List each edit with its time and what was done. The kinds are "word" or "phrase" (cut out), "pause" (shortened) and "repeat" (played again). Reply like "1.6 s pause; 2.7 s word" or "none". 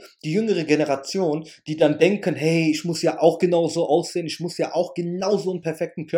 none